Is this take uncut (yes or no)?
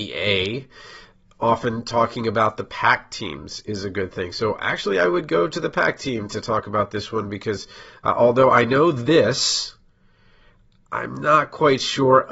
yes